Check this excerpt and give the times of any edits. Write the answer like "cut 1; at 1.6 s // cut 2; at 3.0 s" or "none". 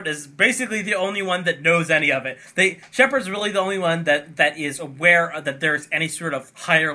none